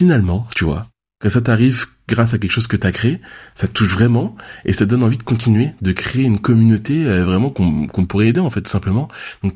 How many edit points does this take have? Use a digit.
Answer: 0